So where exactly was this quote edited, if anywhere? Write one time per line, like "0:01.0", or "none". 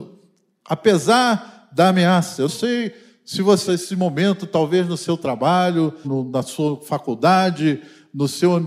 0:02.5
0:03.7
0:06.0